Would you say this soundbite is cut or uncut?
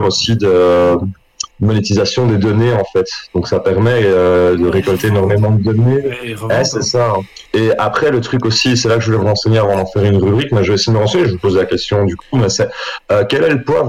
cut